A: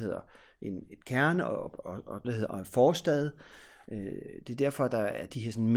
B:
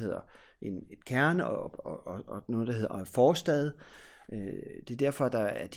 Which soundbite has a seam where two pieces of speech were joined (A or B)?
A